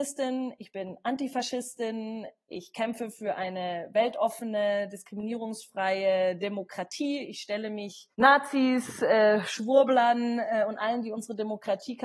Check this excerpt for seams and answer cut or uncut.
cut